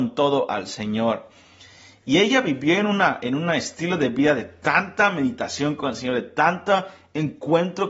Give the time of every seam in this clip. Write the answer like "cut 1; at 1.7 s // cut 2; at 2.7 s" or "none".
none